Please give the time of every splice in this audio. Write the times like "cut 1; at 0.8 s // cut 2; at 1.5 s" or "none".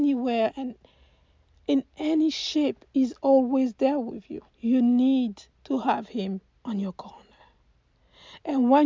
cut 1; at 4.5 s // cut 2; at 5.5 s // cut 3; at 6.5 s